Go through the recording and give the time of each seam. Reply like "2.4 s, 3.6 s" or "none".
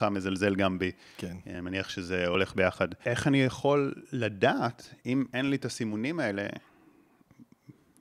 none